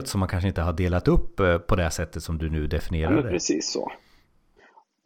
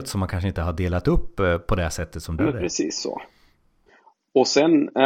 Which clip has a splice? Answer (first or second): second